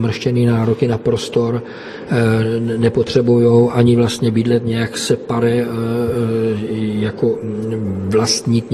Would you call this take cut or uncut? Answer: uncut